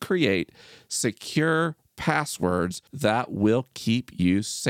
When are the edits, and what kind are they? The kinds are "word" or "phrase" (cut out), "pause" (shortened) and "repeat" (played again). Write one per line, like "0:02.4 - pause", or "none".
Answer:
0:02.9 - pause